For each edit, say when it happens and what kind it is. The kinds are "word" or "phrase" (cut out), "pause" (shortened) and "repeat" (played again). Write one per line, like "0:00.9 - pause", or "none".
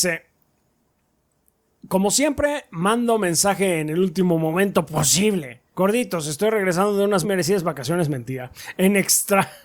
0:05.7 - pause
0:07.2 - word